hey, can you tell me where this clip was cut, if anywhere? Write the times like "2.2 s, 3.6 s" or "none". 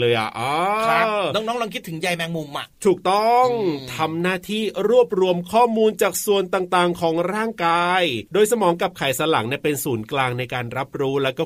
8.3 s